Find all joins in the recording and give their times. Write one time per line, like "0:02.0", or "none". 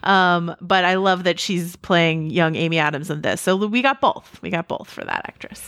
none